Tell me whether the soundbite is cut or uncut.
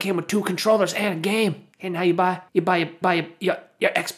cut